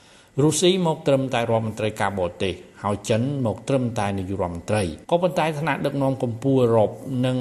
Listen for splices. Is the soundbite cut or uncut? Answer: cut